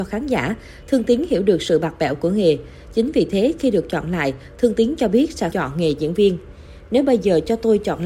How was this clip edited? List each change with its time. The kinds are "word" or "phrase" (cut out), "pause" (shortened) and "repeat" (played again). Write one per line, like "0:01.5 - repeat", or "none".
0:05.5 - word